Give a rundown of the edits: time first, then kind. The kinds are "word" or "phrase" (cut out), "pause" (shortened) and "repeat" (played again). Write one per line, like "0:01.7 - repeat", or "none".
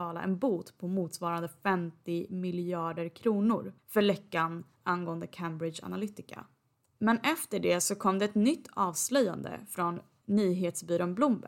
none